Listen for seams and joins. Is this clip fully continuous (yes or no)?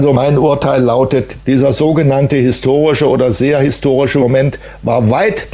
yes